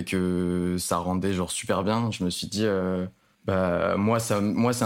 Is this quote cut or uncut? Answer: uncut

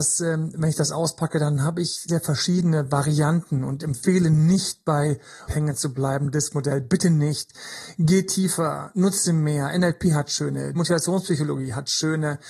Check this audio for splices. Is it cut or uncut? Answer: cut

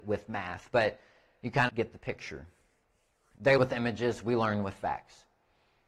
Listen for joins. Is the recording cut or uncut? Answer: cut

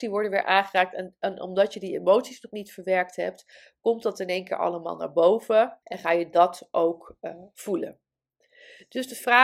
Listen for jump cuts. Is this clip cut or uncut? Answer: cut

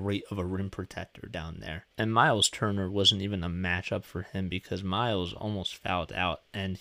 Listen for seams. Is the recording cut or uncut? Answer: cut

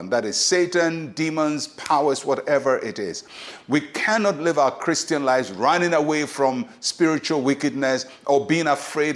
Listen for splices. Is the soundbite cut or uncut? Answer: uncut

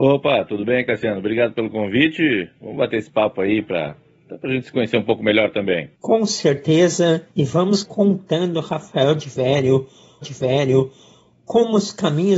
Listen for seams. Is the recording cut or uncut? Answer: cut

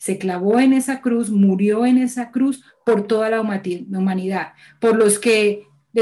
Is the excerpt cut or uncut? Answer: uncut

